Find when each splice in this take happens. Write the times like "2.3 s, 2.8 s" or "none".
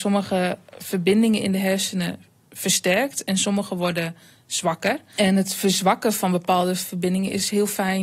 none